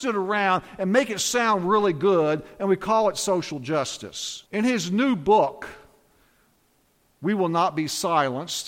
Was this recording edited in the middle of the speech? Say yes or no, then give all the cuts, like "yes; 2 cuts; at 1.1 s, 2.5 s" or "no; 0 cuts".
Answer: yes; 1 cut; at 4.5 s